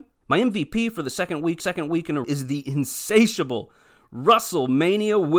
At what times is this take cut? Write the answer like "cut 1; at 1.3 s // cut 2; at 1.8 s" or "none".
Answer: cut 1; at 1.6 s // cut 2; at 2.2 s